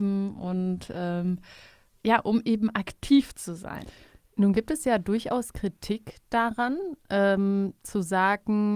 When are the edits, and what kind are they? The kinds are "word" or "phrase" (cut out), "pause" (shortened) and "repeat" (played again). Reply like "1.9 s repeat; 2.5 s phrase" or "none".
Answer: none

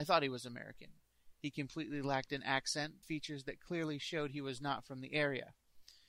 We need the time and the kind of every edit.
3.0 s phrase

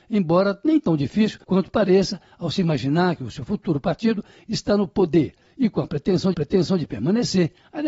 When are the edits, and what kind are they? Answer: 1.4 s pause; 6.3 s repeat

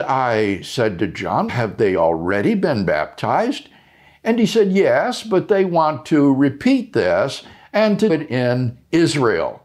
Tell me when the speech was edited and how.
1.5 s word; 8.1 s word

